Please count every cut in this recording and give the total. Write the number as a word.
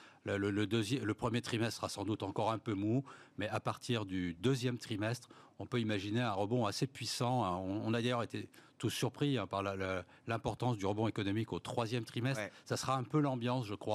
zero